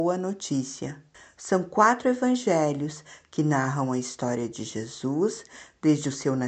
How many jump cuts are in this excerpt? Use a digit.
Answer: 1